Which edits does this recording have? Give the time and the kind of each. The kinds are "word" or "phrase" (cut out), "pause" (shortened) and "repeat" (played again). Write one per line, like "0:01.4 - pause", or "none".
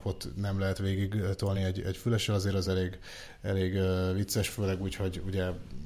none